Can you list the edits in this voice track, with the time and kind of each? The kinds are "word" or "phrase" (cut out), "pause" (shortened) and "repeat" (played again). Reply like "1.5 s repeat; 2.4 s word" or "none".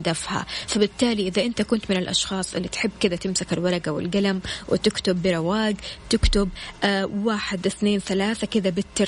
none

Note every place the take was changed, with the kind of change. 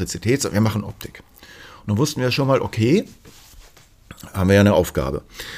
none

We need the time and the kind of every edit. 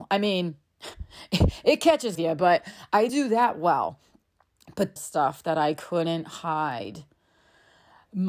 2.1 s phrase; 3.1 s word; 5.0 s phrase

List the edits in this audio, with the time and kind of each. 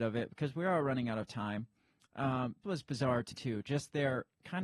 2.6 s word; 3.3 s word

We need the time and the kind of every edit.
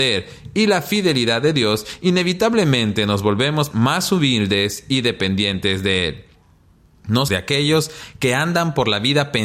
3.7 s word; 7.3 s word

